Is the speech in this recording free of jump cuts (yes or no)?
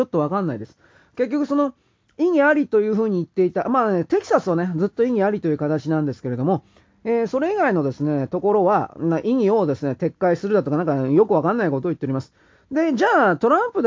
yes